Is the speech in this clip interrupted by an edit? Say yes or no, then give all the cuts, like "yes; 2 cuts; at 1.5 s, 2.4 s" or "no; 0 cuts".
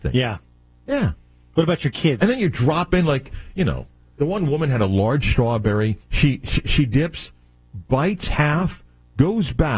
yes; 1 cut; at 6.0 s